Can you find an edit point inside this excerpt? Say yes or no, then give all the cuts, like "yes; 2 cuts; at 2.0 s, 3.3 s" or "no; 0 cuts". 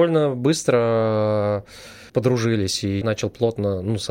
yes; 2 cuts; at 2.1 s, 3.0 s